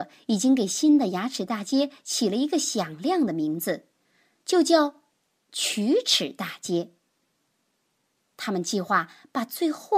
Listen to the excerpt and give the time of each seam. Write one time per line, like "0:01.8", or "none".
none